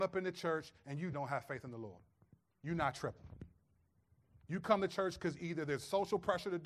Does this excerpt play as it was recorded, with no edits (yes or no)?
no